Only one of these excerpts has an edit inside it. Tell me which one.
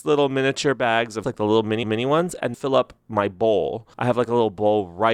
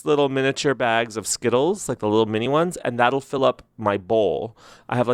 first; 4 cuts; at 1.2 s, 1.8 s, 2.5 s, 3.9 s

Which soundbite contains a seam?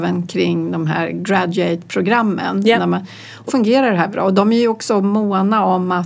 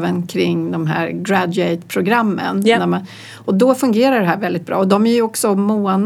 first; 2 cuts; at 3.5 s, 4.1 s

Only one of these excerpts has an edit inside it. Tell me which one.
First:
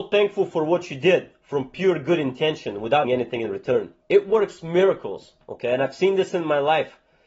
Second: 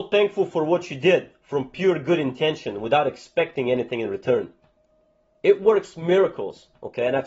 first; 2 cuts; at 3.0 s, 4.0 s

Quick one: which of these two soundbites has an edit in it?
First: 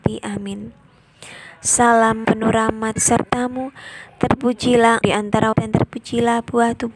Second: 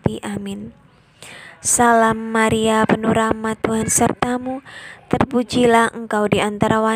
first; 4 cuts; at 2.2 s, 3.0 s, 5.0 s, 5.5 s

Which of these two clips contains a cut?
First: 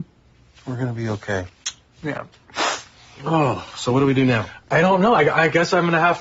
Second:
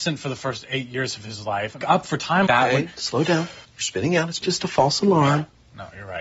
second; 4 cuts; at 1.8 s, 2.5 s, 3.6 s, 4.4 s

